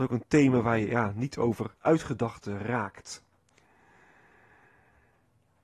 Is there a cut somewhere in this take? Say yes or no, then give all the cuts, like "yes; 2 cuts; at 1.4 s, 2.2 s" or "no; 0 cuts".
yes; 1 cut; at 1.8 s